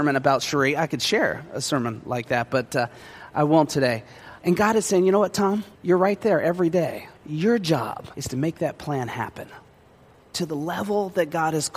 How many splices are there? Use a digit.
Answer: 4